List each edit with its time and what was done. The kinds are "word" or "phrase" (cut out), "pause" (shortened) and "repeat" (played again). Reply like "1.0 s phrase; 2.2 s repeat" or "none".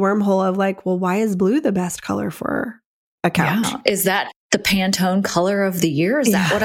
none